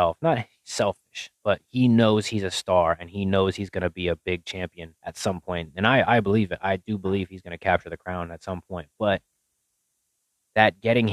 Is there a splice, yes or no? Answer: yes